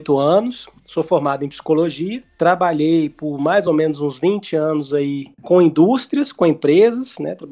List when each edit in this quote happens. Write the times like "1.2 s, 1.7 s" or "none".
none